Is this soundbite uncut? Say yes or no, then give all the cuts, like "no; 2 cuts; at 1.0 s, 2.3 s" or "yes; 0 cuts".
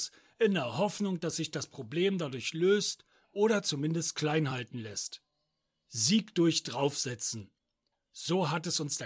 yes; 0 cuts